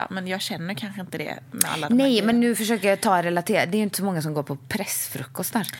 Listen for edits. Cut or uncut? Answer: uncut